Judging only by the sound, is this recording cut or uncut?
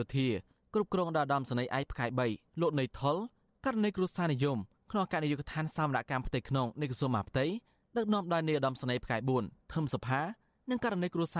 uncut